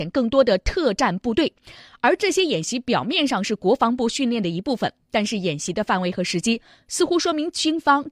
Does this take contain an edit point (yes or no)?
no